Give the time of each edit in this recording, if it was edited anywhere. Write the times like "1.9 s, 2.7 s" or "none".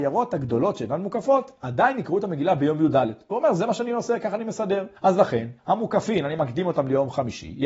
5.0 s